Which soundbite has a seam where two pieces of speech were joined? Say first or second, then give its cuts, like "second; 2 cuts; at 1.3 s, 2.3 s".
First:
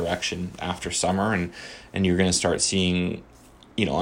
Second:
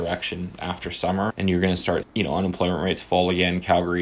second; 2 cuts; at 1.3 s, 2.0 s